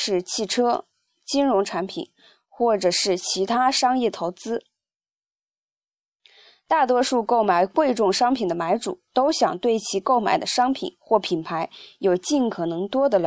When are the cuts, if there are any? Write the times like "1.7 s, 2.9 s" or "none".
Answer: none